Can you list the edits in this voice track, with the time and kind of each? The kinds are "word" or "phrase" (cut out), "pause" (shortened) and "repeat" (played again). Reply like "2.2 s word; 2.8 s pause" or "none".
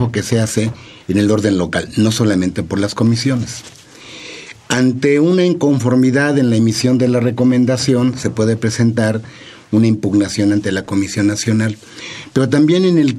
none

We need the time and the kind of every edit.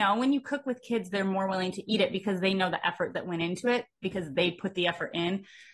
none

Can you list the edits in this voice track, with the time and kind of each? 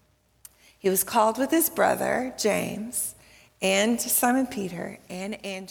none

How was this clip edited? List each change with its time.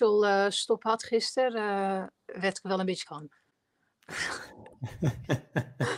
2.2 s pause; 3.0 s word

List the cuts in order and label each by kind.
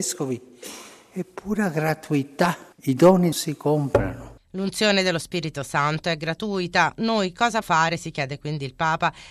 2.7 s pause; 3.3 s phrase; 7.6 s word

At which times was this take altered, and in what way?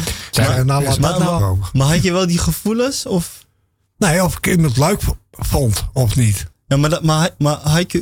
1.4 s word

